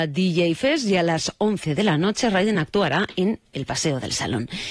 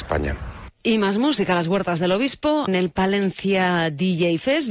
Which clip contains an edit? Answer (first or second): second